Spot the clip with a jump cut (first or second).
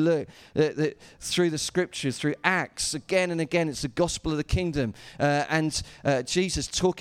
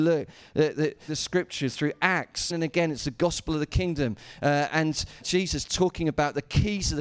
second